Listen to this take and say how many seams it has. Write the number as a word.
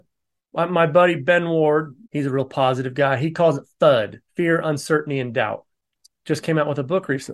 two